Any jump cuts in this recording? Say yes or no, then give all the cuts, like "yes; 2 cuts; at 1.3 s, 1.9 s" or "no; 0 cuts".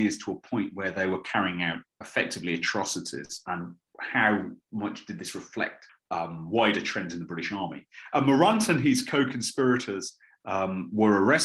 no; 0 cuts